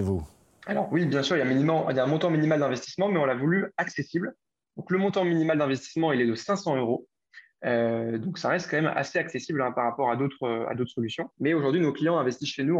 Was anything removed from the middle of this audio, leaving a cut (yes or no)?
yes